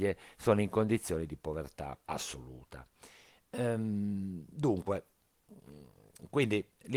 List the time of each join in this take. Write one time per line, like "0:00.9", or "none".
0:02.0